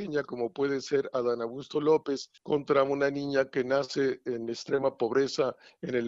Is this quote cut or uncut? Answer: cut